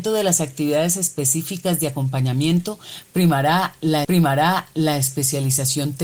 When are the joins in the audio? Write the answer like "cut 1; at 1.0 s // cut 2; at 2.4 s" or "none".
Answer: cut 1; at 4.0 s